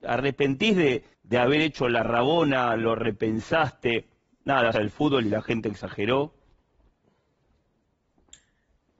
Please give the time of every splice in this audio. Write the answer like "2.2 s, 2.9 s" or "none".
1.1 s, 4.7 s

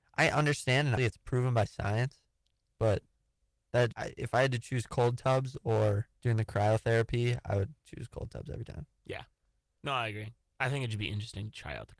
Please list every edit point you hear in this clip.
1.0 s, 3.9 s, 6.2 s

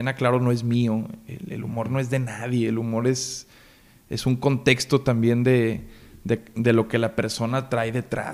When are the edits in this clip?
none

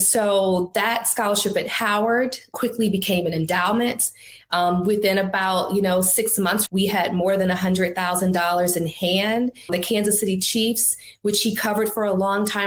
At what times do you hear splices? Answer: 2.5 s, 6.7 s, 9.7 s

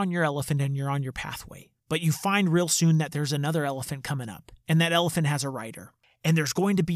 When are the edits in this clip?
1.8 s

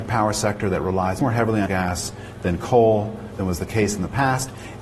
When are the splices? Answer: 1.2 s, 1.7 s, 3.4 s

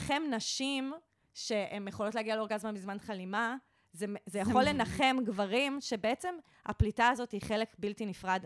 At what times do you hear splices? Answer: none

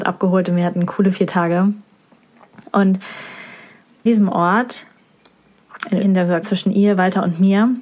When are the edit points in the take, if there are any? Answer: 4.1 s, 6.0 s, 6.4 s

